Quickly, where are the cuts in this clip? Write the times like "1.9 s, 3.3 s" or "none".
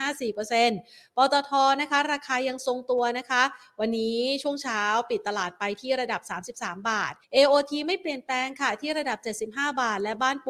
7.2 s